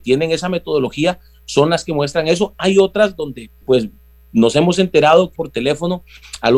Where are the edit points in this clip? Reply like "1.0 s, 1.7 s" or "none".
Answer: 3.6 s, 5.4 s